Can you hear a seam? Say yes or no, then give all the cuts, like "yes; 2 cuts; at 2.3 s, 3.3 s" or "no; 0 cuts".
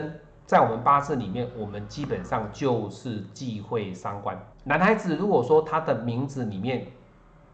yes; 1 cut; at 4.5 s